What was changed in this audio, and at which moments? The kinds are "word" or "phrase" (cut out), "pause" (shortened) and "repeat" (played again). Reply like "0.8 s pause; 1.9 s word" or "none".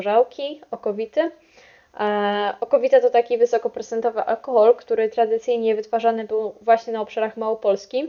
none